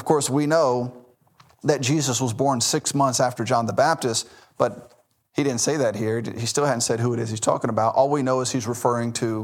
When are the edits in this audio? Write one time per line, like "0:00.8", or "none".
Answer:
none